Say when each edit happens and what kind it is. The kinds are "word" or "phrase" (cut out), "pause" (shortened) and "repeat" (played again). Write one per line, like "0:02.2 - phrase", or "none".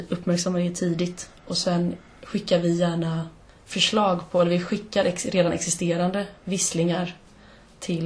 0:03.5 - pause